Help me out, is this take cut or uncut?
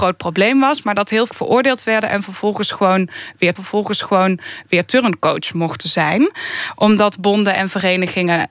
cut